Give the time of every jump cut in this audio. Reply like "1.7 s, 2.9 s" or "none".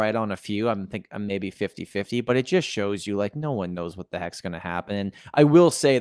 none